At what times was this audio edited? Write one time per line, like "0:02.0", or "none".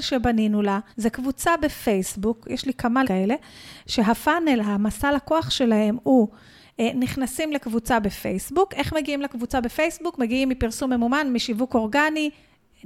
0:00.9
0:03.0